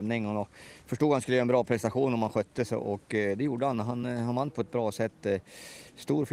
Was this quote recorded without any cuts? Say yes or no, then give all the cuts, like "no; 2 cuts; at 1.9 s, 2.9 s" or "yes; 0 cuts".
yes; 0 cuts